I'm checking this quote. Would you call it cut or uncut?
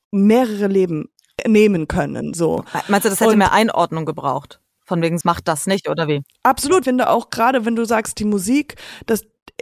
cut